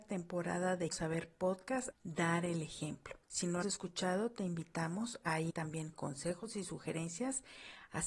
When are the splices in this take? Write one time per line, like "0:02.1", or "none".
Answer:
0:00.9
0:01.9
0:03.2
0:03.6
0:05.5

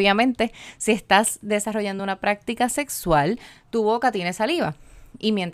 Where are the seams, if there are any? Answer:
none

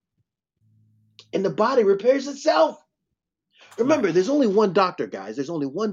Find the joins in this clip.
none

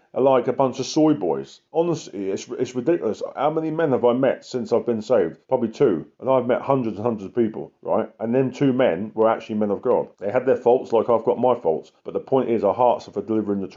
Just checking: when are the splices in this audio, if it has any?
0:01.7
0:05.4
0:06.1
0:07.8
0:10.1
0:12.0

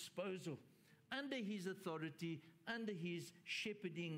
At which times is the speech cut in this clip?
none

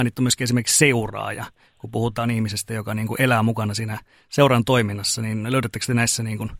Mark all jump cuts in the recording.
none

